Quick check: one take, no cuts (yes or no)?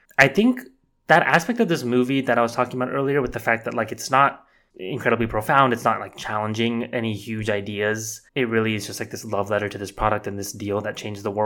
no